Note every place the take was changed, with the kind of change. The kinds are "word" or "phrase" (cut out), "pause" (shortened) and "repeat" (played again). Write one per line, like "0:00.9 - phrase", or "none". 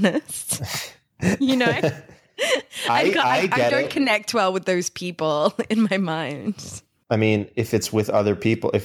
none